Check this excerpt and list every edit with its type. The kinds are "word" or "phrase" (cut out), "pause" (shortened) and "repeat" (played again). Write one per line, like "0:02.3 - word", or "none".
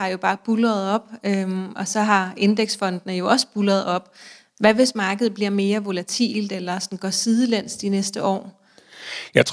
none